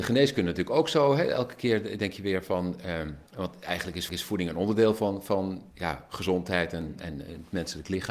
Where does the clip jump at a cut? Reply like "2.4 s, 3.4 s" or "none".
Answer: 3.3 s, 4.1 s, 5.7 s